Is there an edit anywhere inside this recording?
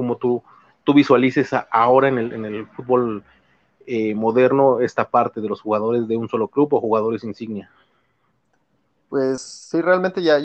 no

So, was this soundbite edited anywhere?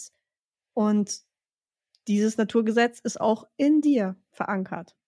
no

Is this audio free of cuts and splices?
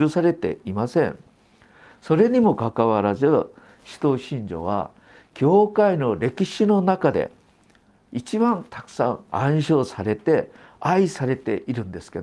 yes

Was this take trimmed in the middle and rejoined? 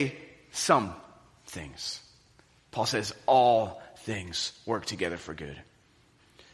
no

